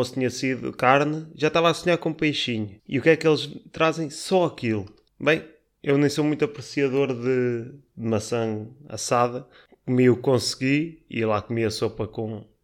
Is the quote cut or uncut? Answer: cut